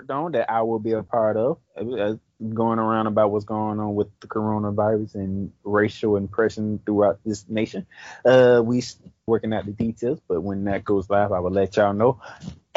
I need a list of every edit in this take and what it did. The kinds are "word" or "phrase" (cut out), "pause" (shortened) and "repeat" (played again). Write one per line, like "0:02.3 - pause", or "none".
0:01.7 - pause
0:09.3 - word